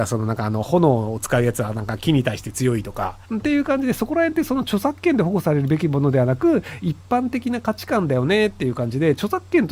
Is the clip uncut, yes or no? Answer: no